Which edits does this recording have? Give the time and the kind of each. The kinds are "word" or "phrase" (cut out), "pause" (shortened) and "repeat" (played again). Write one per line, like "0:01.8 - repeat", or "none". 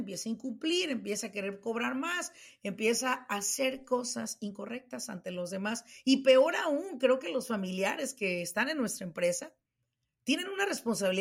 none